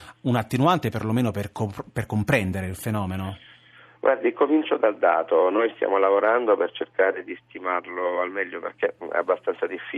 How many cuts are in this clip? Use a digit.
0